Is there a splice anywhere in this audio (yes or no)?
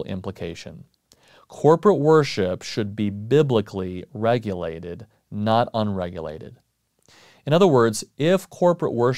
no